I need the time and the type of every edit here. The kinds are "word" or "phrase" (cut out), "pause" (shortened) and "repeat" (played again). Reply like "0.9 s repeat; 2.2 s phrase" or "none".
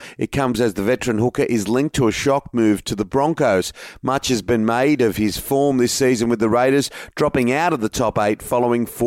none